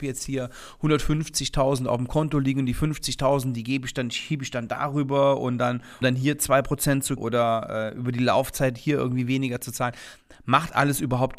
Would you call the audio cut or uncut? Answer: cut